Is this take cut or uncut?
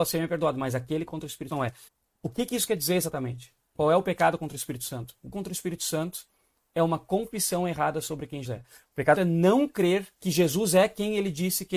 cut